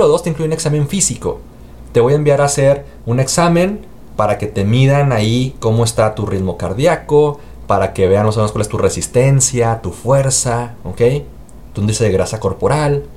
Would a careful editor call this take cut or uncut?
uncut